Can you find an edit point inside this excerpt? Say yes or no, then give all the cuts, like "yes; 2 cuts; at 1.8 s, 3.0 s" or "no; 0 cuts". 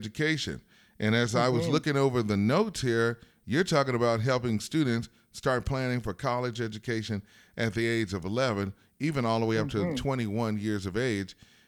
no; 0 cuts